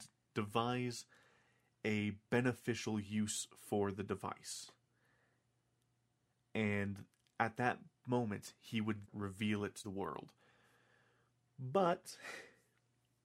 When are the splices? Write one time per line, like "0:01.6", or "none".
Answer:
0:09.0
0:09.8

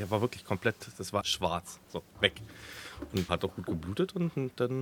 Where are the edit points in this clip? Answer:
0:01.2
0:02.1
0:03.3

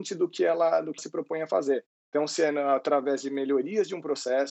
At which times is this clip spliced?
0:01.0

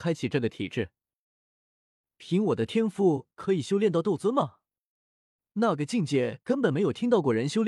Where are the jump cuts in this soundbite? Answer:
none

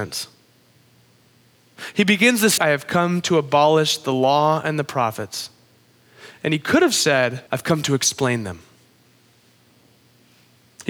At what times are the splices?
0:02.6
0:07.5

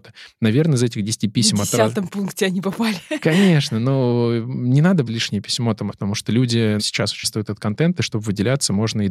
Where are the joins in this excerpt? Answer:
0:05.1
0:05.9
0:06.8
0:07.2

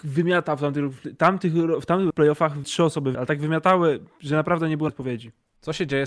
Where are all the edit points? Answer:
0:02.1
0:02.6
0:03.1
0:04.9

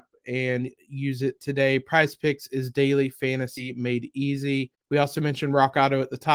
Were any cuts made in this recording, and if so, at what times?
0:04.8

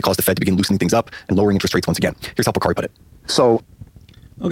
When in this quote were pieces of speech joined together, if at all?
none

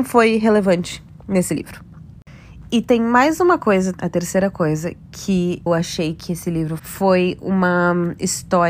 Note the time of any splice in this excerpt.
0:03.9
0:05.7
0:06.8

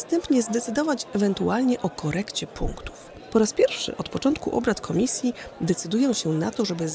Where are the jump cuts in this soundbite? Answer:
none

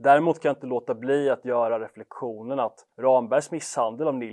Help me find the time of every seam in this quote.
0:02.9

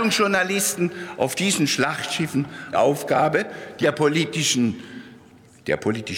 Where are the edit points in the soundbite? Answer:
0:02.7
0:03.8

